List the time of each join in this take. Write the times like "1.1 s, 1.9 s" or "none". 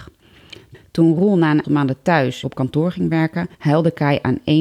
1.6 s, 2.4 s, 3.5 s